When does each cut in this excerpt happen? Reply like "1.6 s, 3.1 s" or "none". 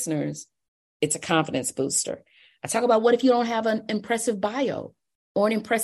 none